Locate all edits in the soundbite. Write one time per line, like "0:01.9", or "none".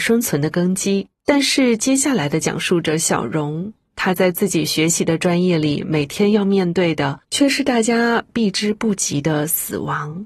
0:01.2
0:07.2